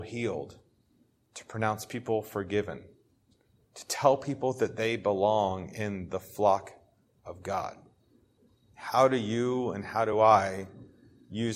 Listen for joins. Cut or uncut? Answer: uncut